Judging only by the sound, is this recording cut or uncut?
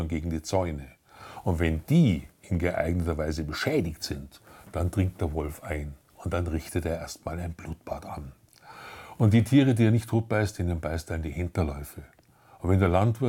uncut